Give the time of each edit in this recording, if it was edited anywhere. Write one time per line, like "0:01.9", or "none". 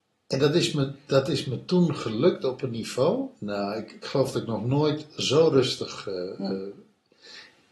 0:03.4